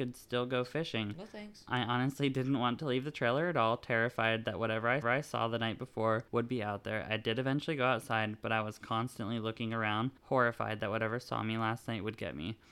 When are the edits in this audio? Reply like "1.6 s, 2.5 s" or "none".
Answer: 5.0 s, 6.3 s, 10.2 s